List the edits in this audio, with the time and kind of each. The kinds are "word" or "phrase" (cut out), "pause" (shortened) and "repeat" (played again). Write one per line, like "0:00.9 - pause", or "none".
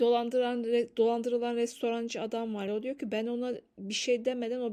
0:02.7 - word

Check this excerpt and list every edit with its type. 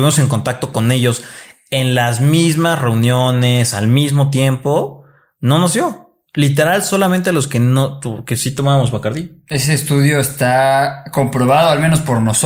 none

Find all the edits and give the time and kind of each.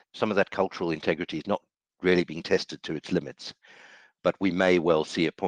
none

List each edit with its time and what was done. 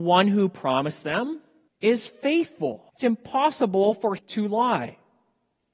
0:01.7 - pause
0:02.9 - pause
0:04.2 - word

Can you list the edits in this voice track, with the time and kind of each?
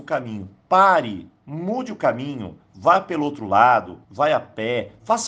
0:04.0 - pause

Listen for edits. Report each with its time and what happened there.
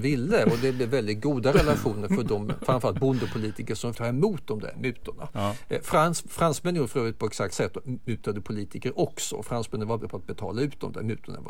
0:03.9 - word
0:07.5 - word
0:10.0 - word

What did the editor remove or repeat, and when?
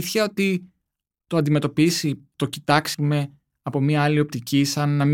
0:01.1 - phrase
0:02.9 - word

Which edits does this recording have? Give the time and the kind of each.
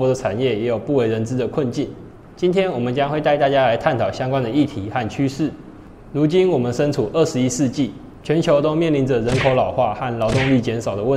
none

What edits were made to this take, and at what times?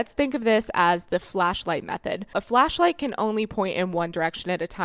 none

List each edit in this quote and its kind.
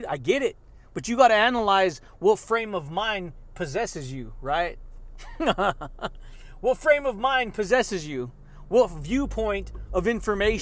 none

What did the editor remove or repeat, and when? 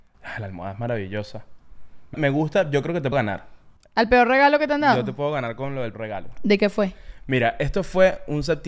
0:02.1 - word
0:03.1 - word
0:05.9 - word

